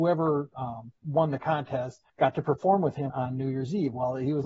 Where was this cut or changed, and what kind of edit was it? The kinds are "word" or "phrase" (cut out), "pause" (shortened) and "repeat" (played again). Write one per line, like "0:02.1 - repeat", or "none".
0:01.0 - pause
0:02.1 - pause
0:03.1 - word